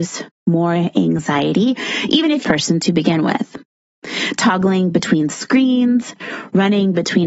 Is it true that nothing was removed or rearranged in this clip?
no; 1 cut; at 2.4 s

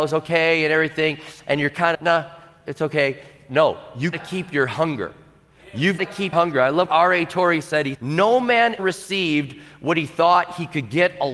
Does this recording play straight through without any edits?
no; 7 cuts; at 1.9 s, 4.1 s, 6.0 s, 6.3 s, 6.9 s, 7.9 s, 8.8 s

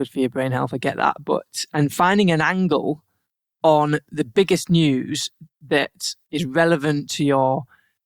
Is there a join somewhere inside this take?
no; 0 cuts

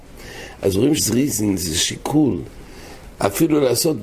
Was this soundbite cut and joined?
yes; 1 cut; at 1.0 s

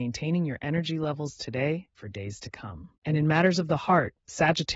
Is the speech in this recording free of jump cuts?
no; 2 cuts; at 2.0 s, 3.0 s

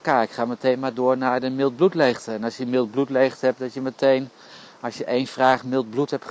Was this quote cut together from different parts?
no; 0 cuts

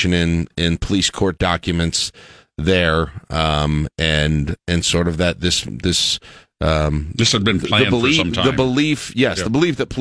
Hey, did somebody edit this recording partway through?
no; 0 cuts

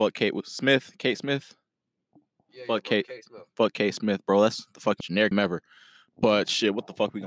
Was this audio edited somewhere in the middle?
yes; 2 cuts; at 5.0 s, 5.3 s

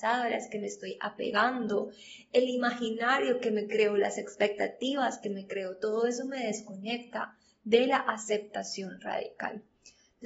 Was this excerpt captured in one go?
yes; 0 cuts

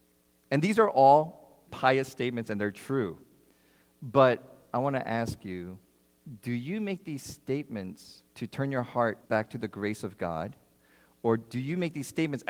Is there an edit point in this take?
yes; 3 cuts; at 1.7 s, 8.3 s, 9.2 s

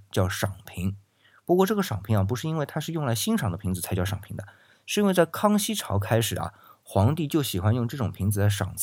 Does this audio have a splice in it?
no; 0 cuts

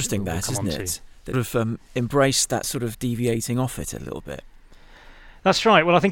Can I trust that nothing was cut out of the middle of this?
no; 3 cuts; at 1.3 s, 2.6 s, 2.9 s

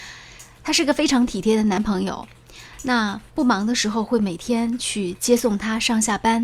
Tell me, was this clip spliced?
yes; 1 cut; at 3.3 s

